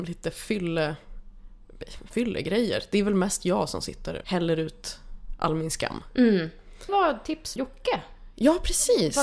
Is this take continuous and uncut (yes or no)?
no